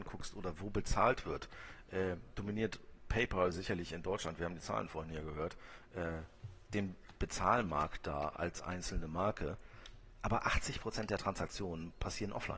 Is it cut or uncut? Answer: uncut